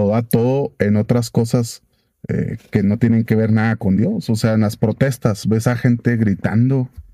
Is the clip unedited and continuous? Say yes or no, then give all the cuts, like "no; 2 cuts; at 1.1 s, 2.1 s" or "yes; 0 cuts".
yes; 0 cuts